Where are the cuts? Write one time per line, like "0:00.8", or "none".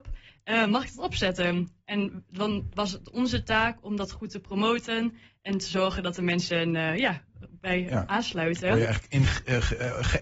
none